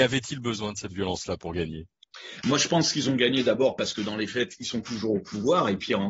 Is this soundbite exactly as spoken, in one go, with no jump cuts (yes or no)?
no